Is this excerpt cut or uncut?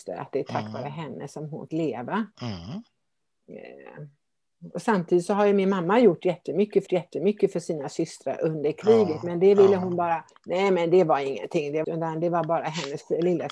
cut